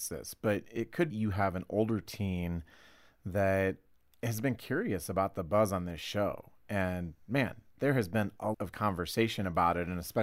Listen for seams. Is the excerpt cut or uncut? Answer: cut